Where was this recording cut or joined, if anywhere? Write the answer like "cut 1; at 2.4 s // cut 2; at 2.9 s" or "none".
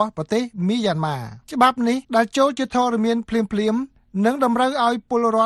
cut 1; at 1.4 s // cut 2; at 2.0 s